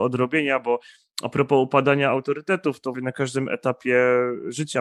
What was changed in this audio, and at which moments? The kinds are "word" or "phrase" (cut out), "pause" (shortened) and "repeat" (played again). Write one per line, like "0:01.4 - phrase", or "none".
0:02.9 - word

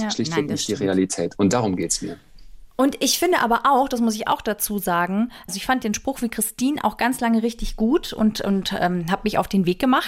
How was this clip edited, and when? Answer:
none

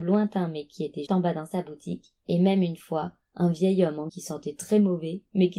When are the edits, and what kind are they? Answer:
0:01.1 - word
0:02.2 - pause
0:04.1 - word

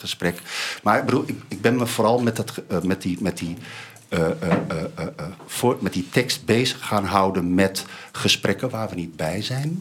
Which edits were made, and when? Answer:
none

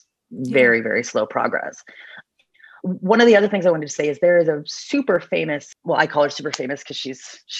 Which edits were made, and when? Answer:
none

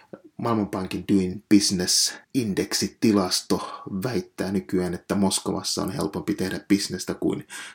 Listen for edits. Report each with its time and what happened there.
0:02.2 - pause

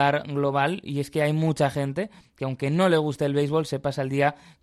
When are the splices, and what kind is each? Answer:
none

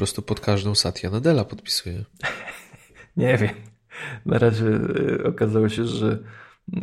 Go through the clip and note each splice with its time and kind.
none

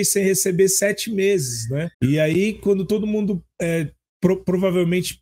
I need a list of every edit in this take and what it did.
0:01.9 - pause

